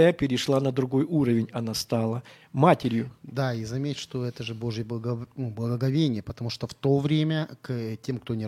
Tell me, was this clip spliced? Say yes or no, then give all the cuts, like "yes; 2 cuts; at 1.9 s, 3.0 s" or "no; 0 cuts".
no; 0 cuts